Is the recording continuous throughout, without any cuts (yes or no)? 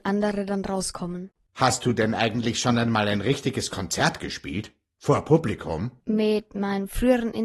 yes